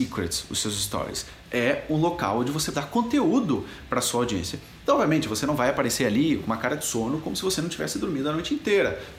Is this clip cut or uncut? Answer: cut